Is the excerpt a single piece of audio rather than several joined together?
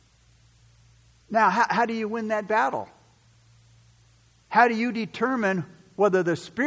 yes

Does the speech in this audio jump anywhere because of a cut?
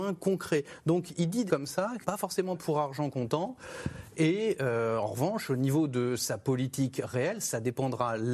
yes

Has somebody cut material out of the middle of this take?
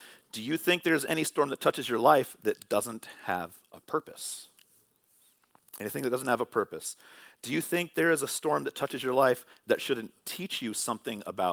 no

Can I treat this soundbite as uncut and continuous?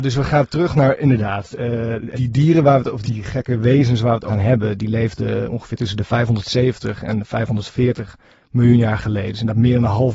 no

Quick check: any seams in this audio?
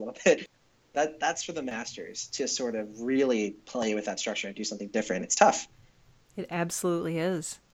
no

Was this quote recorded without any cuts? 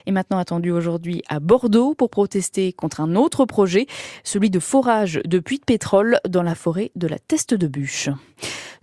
yes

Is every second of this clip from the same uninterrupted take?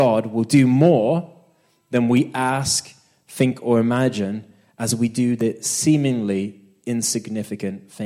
yes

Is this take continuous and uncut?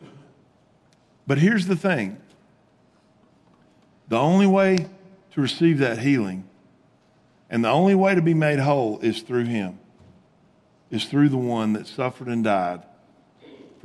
yes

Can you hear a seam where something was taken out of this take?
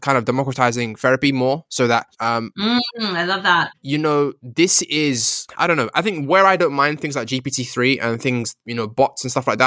no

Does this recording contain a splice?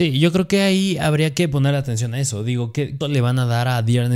yes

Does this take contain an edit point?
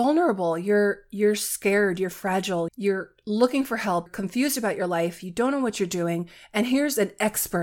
yes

